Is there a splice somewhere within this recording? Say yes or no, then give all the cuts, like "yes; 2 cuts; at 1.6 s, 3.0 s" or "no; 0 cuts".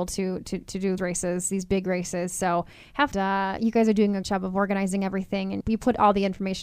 yes; 4 cuts; at 1.0 s, 3.1 s, 4.2 s, 5.6 s